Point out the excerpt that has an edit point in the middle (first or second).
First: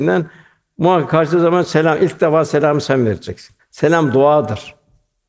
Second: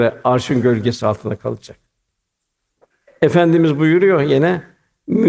first